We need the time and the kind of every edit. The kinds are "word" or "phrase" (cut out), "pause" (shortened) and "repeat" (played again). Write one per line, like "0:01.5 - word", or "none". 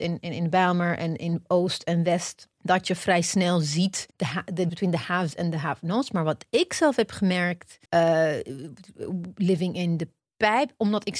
0:02.5 - pause
0:04.1 - pause
0:04.7 - word
0:07.9 - pause